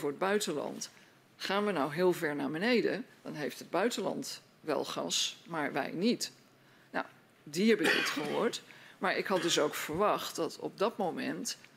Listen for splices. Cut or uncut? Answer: uncut